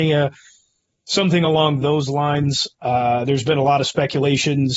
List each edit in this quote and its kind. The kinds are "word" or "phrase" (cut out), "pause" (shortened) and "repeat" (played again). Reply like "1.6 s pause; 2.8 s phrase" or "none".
none